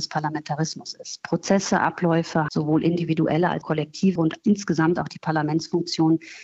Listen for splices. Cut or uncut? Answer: cut